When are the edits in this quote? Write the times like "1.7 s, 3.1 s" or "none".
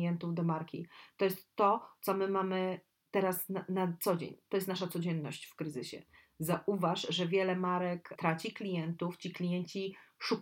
none